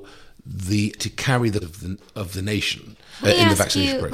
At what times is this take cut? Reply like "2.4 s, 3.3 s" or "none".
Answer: 1.0 s, 1.6 s, 3.2 s